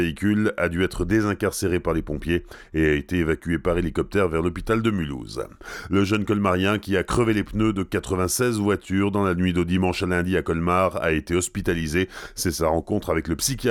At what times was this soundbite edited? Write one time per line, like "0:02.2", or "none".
none